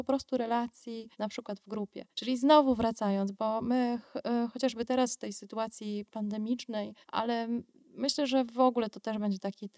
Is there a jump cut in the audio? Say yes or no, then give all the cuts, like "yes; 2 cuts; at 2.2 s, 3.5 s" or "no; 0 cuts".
yes; 3 cuts; at 1.1 s, 2.1 s, 7.0 s